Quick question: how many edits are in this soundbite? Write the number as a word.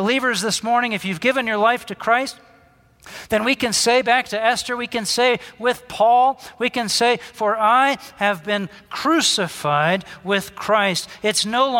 zero